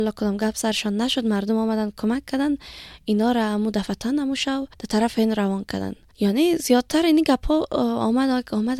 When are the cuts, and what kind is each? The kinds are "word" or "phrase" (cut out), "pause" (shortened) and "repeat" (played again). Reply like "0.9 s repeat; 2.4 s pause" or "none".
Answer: none